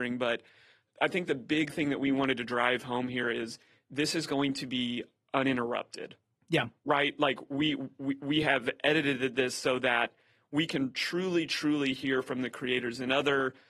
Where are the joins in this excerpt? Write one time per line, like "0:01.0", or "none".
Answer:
none